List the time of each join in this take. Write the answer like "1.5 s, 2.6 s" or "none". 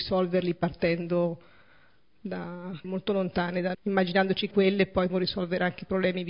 2.8 s, 3.7 s, 4.5 s, 5.1 s